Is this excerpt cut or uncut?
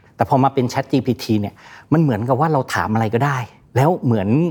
cut